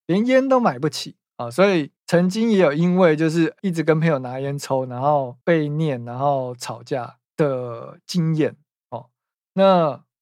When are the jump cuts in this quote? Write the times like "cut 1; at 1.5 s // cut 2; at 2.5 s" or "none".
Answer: cut 1; at 2.0 s // cut 2; at 3.6 s // cut 3; at 5.4 s // cut 4; at 7.2 s